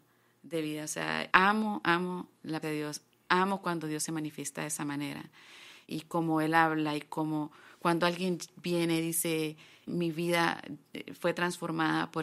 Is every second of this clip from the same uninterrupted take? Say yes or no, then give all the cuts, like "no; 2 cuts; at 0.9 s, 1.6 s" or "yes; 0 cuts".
no; 4 cuts; at 1.3 s, 2.6 s, 5.9 s, 9.9 s